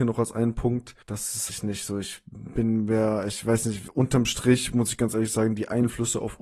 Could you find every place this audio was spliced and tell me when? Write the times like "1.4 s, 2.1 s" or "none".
1.0 s, 1.5 s